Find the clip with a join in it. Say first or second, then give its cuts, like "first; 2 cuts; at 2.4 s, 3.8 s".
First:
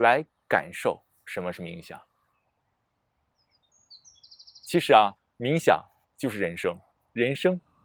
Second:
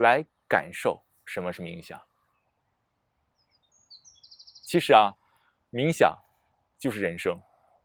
first; 3 cuts; at 5.2 s, 6.0 s, 6.9 s